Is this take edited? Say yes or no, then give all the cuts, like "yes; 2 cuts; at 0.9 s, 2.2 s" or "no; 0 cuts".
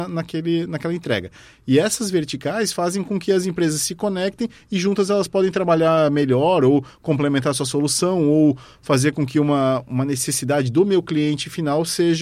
no; 0 cuts